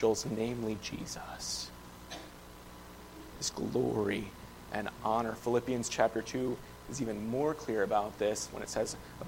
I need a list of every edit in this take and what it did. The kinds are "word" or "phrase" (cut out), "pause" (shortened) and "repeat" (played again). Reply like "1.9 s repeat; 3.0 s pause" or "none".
3.5 s phrase